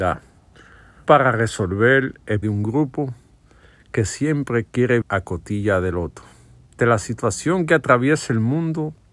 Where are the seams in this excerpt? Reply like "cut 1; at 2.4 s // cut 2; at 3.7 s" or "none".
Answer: cut 1; at 1.1 s // cut 2; at 2.4 s // cut 3; at 5.0 s // cut 4; at 6.8 s